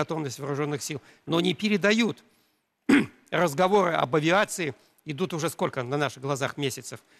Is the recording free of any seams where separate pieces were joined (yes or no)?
yes